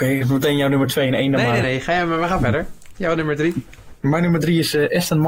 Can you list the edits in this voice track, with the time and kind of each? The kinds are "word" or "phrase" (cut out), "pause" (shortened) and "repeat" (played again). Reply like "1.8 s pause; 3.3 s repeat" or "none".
1.6 s phrase; 4.0 s pause